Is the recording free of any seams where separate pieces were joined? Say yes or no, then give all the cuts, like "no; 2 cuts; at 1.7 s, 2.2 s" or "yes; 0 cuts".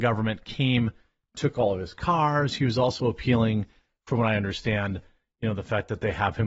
yes; 0 cuts